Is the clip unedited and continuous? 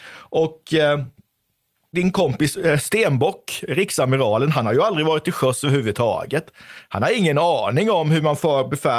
yes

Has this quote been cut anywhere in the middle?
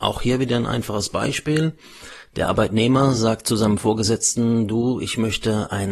no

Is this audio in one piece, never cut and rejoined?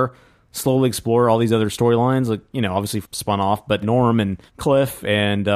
no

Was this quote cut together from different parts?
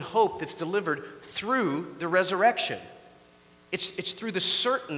no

